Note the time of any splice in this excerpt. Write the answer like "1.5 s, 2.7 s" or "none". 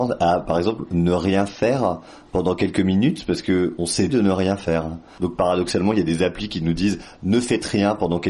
4.1 s